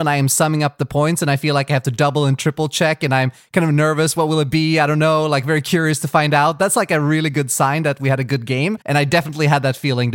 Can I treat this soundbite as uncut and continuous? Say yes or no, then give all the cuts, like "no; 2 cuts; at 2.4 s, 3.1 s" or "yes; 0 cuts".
no; 1 cut; at 8.8 s